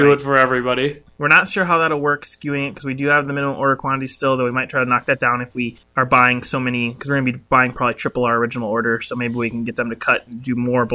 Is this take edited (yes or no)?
no